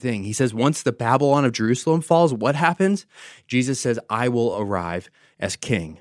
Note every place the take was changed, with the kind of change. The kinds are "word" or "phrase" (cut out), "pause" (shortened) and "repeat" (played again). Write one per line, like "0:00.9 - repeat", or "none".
none